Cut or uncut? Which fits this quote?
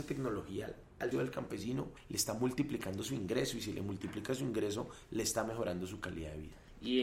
cut